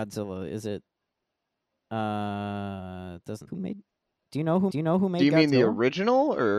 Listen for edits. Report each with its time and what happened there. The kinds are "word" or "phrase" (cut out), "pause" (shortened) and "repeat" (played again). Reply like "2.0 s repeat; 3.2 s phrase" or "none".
3.5 s word; 4.7 s repeat